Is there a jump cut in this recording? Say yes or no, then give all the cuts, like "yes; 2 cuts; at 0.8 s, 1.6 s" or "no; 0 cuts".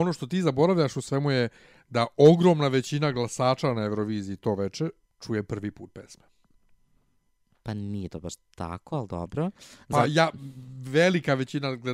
no; 0 cuts